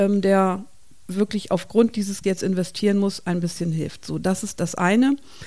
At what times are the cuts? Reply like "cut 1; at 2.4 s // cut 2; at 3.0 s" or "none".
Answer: cut 1; at 2.2 s